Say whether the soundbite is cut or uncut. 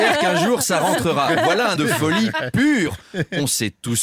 cut